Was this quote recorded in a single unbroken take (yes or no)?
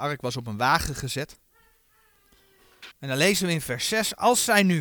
no